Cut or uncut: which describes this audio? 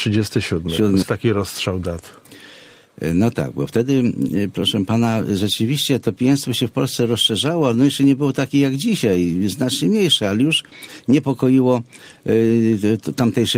cut